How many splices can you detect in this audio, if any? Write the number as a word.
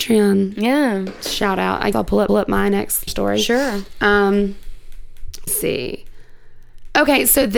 four